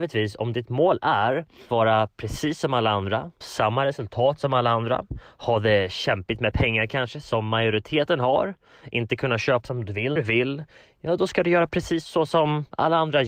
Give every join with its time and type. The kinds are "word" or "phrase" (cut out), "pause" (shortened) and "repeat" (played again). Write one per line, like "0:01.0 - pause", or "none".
0:01.7 - word
0:03.4 - word
0:09.6 - word
0:10.2 - word